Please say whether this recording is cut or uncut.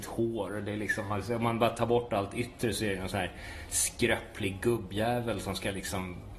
uncut